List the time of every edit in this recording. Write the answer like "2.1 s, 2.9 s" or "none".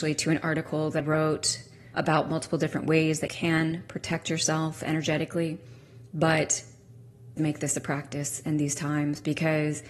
1.0 s, 1.9 s, 3.3 s, 7.4 s